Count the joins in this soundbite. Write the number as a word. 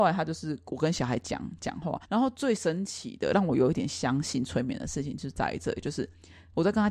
one